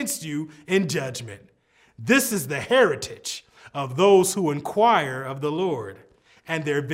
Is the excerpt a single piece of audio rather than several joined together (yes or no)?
yes